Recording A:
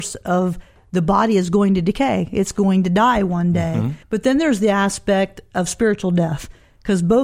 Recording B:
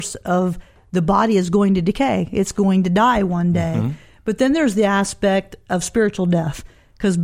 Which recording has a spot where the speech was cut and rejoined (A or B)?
A